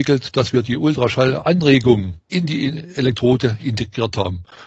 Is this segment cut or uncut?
cut